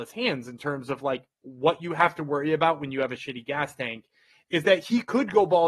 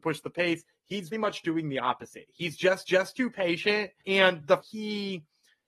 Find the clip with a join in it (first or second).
second